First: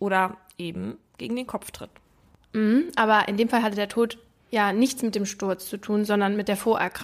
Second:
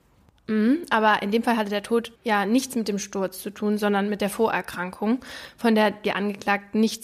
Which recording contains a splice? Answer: second; 1 cut; at 2.2 s

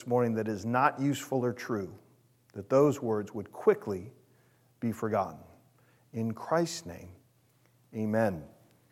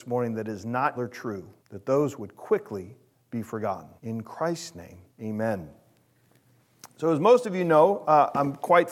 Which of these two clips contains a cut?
second; 6 cuts; at 1.0 s, 1.6 s, 2.2 s, 3.1 s, 4.0 s, 5.1 s

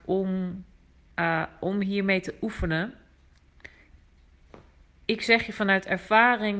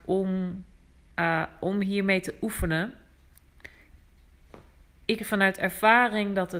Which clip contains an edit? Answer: second; 1 cut; at 5.2 s

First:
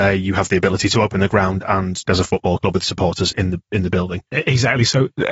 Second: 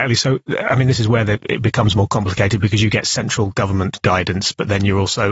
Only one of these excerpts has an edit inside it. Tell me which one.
first; 2 cuts; at 2.1 s, 3.3 s

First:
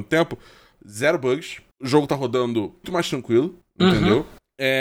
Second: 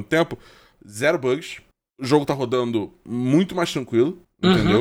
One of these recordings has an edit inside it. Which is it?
first; 2 cuts; at 1.7 s, 2.8 s

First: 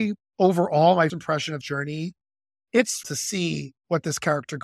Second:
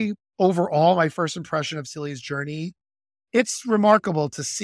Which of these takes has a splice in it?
first; 3 cuts; at 1.1 s, 1.6 s, 3.0 s

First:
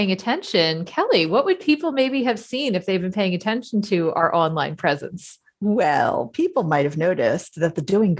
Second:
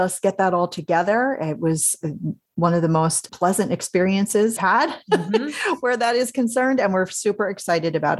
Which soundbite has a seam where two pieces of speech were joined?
second; 2 cuts; at 3.3 s, 4.6 s

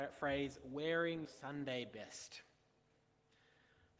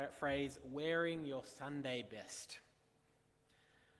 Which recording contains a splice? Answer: first; 1 cut; at 1.2 s

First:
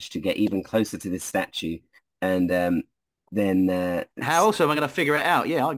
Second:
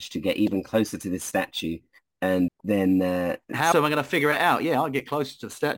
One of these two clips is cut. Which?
second; 2 cuts; at 2.5 s, 3.7 s

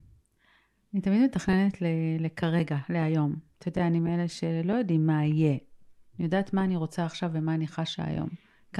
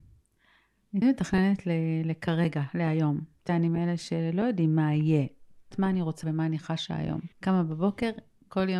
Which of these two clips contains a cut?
second; 5 cuts; at 1.0 s, 3.5 s, 5.7 s, 6.2 s, 7.3 s

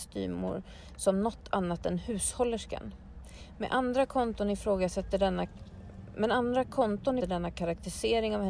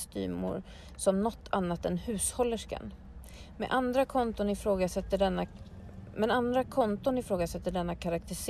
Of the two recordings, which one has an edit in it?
first; 1 cut; at 7.2 s

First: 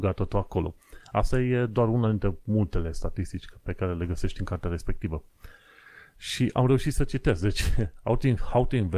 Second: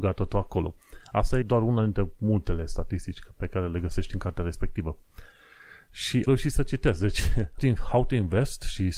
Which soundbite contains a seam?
second; 3 cuts; at 1.4 s, 6.3 s, 7.6 s

